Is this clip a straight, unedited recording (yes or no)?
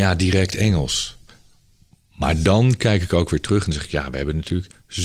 yes